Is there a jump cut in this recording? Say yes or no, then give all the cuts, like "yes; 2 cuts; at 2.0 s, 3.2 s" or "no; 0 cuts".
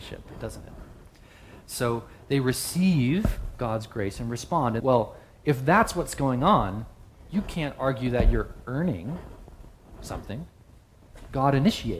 yes; 1 cut; at 4.8 s